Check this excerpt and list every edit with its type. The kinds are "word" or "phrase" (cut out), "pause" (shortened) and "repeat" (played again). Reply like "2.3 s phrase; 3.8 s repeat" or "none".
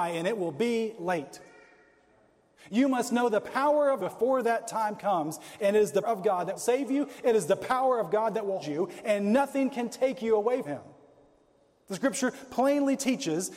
1.0 s word; 4.0 s word; 6.0 s word; 6.6 s word; 8.6 s word; 10.6 s word